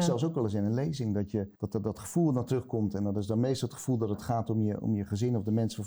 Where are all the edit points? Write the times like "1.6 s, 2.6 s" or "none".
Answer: 1.5 s